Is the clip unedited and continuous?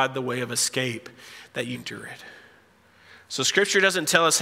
no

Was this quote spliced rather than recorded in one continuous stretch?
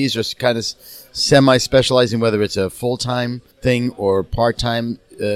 yes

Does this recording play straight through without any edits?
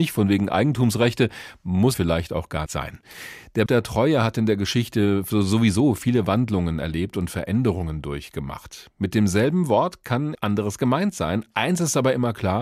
no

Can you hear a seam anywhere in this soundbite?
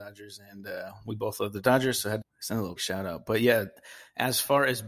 yes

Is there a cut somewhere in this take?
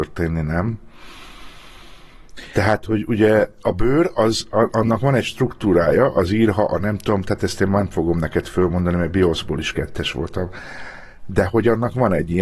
no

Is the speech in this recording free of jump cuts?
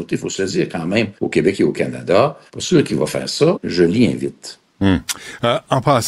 no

